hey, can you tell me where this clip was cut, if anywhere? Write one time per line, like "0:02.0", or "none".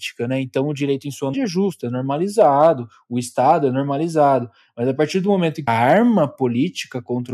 0:01.3
0:05.7